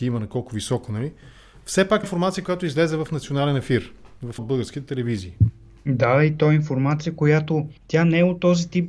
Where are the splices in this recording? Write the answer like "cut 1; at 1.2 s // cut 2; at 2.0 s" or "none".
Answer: cut 1; at 2.0 s // cut 2; at 4.4 s // cut 3; at 7.8 s